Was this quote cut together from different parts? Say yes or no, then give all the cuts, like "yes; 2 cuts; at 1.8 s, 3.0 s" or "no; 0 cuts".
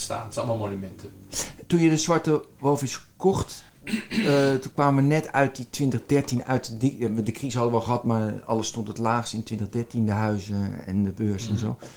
no; 0 cuts